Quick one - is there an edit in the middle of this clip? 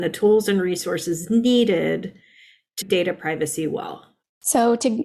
yes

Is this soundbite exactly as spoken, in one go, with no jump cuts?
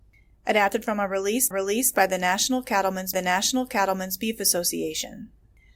no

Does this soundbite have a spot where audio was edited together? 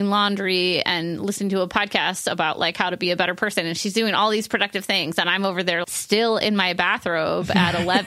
yes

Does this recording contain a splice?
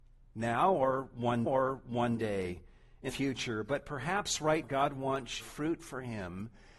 yes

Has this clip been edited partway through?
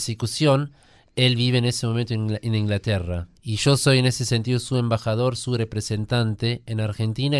yes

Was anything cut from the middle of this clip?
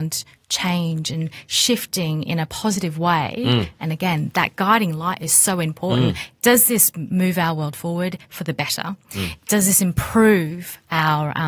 no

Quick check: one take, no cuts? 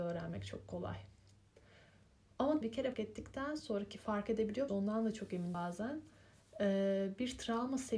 no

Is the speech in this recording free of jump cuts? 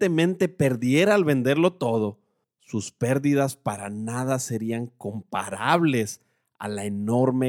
yes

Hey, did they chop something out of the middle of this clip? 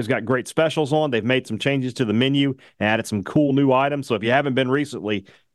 no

